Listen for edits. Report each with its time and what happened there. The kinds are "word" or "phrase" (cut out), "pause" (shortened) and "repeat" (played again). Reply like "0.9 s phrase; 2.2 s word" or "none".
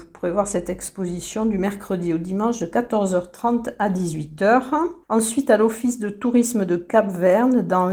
5.0 s pause